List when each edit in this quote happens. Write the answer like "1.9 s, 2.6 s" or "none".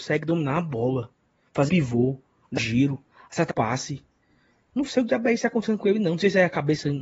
1.7 s, 2.6 s, 3.5 s